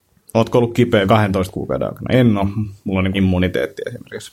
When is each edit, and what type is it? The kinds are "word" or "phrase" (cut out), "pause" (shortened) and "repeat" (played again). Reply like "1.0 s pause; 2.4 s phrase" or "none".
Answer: 1.0 s word; 3.1 s word